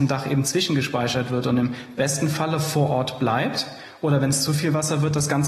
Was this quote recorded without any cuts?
yes; 0 cuts

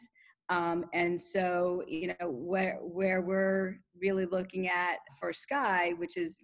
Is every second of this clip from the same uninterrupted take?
no; 1 cut; at 5.1 s

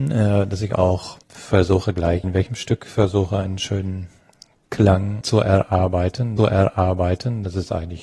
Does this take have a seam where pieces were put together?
yes; 4 cuts; at 1.2 s, 2.2 s, 5.2 s, 6.4 s

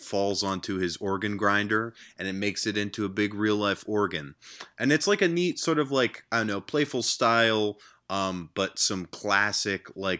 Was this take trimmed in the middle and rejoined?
no; 0 cuts

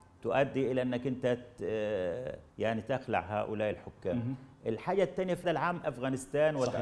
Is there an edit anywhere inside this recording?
yes; 3 cuts; at 2.5 s, 5.4 s, 5.8 s

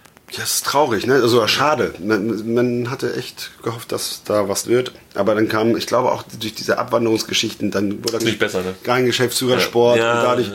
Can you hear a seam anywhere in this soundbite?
yes; 2 cuts; at 4.6 s, 8.2 s

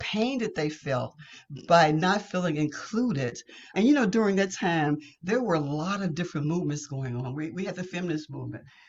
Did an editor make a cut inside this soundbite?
yes; 1 cut; at 3.7 s

